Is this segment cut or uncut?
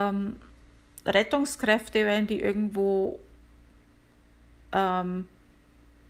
uncut